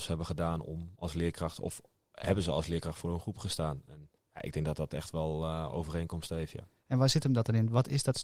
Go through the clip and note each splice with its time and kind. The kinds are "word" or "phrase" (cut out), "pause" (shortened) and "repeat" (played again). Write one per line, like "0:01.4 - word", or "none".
0:04.2 - pause

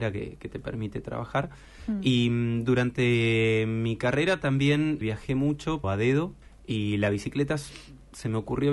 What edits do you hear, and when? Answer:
0:05.0 - word
0:05.8 - word
0:06.4 - pause

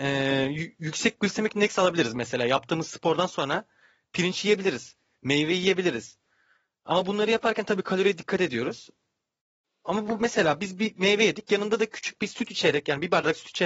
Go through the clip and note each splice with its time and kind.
none

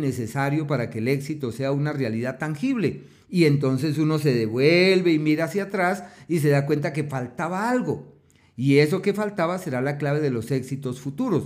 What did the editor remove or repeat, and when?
none

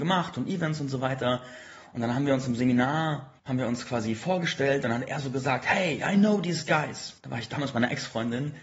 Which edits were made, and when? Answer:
0:03.4 - pause
0:07.2 - pause

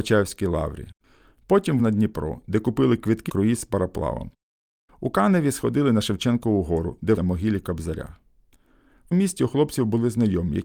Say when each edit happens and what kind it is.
0:01.8 - word
0:03.3 - word
0:07.2 - word
0:09.1 - word

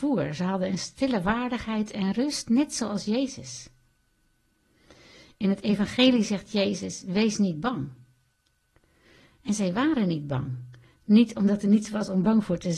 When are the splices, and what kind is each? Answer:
none

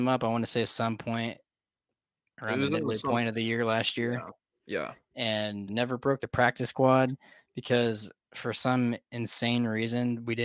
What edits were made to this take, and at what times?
0:05.7 - word

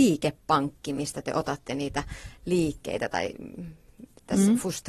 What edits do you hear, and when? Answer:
none

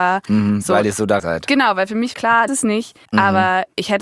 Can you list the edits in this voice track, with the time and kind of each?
0:01.2 - word
0:02.1 - word
0:02.5 - phrase
0:03.0 - pause

